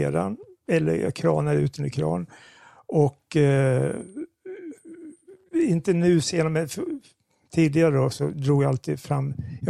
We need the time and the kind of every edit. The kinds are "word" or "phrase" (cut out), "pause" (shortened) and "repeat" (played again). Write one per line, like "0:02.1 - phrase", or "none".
none